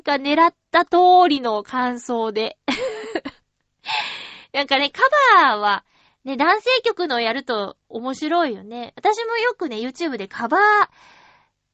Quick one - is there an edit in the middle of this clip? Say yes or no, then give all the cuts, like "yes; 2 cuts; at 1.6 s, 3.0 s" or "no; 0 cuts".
no; 0 cuts